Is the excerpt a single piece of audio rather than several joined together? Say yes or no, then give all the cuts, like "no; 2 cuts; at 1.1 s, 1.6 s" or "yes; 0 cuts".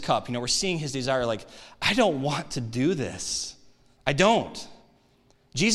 yes; 0 cuts